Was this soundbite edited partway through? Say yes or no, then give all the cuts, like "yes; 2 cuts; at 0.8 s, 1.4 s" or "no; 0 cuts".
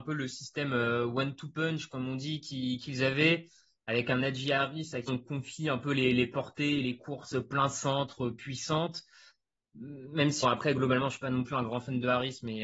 yes; 2 cuts; at 5.1 s, 10.4 s